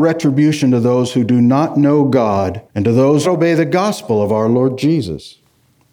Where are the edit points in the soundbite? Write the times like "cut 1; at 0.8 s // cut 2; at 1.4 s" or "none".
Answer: cut 1; at 2.7 s // cut 2; at 3.2 s